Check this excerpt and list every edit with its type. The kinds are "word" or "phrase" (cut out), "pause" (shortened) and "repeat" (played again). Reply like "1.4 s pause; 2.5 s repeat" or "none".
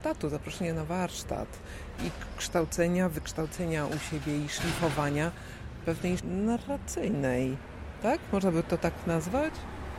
6.2 s word